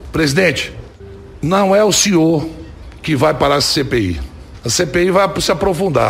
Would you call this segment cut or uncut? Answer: uncut